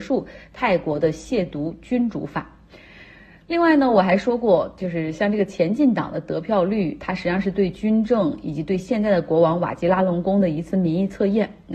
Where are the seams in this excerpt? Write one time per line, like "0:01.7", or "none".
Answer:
none